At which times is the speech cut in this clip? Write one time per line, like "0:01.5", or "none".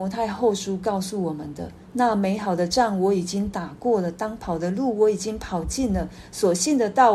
none